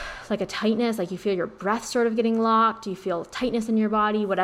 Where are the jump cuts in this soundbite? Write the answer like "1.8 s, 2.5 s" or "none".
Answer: none